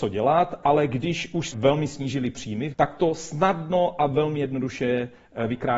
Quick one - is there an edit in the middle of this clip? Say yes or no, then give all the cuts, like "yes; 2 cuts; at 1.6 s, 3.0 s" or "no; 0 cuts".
yes; 2 cuts; at 1.5 s, 2.7 s